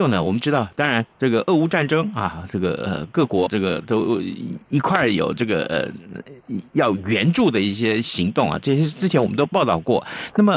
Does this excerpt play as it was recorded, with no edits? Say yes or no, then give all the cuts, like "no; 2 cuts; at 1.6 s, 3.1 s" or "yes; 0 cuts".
no; 1 cut; at 3.5 s